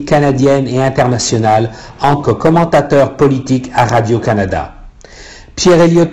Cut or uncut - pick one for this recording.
cut